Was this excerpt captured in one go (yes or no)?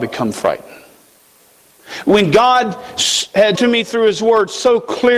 no